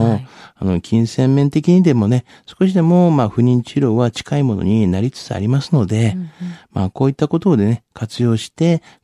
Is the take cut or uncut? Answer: uncut